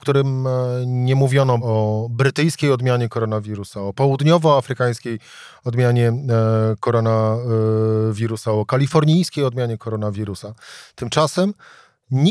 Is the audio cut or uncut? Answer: cut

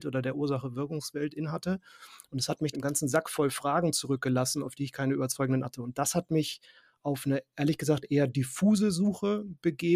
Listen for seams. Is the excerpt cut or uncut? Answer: cut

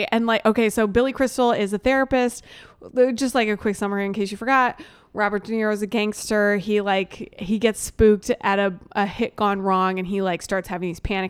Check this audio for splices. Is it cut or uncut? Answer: uncut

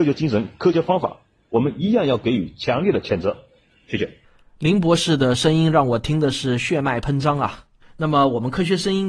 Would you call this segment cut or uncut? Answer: uncut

